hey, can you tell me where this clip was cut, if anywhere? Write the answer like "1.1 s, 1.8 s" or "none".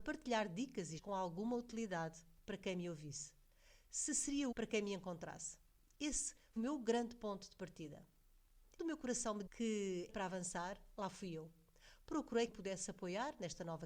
1.0 s, 4.5 s, 6.6 s, 8.8 s, 9.5 s, 10.1 s, 12.5 s